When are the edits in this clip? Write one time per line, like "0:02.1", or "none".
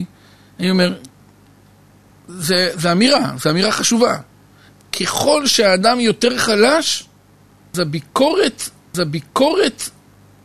0:08.9